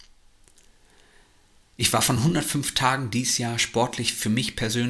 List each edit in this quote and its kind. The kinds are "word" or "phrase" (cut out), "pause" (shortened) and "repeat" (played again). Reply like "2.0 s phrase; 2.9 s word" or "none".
none